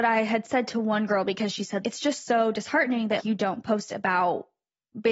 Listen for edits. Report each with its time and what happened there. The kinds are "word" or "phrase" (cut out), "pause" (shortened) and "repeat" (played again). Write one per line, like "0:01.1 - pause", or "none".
0:01.8 - word
0:03.2 - word